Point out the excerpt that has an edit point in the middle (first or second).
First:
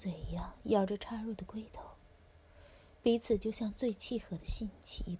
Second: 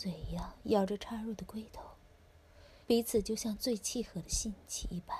second